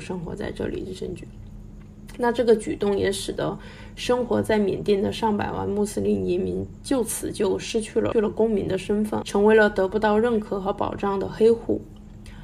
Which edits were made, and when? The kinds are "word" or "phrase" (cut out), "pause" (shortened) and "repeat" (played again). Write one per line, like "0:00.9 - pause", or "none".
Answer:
0:09.2 - phrase